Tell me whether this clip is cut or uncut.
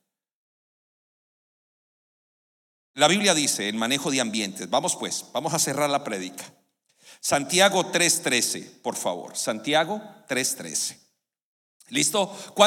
uncut